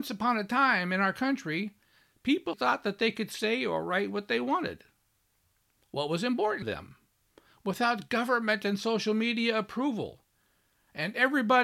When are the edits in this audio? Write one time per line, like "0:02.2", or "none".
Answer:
0:02.5
0:06.6